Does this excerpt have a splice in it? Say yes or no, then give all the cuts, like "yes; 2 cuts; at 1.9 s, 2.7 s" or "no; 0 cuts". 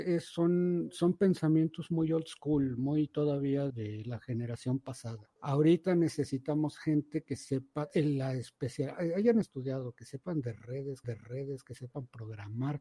yes; 4 cuts; at 3.7 s, 5.4 s, 9.4 s, 11.0 s